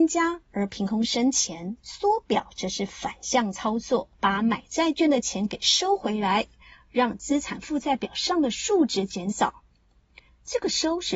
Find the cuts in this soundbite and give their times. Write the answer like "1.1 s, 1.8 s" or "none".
1.8 s, 4.1 s